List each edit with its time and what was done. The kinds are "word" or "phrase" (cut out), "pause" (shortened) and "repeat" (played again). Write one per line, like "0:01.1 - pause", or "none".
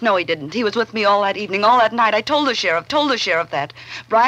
0:02.9 - repeat